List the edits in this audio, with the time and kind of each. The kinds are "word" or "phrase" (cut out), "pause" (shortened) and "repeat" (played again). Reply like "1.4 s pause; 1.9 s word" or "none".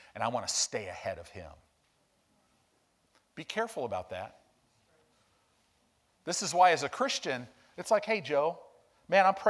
none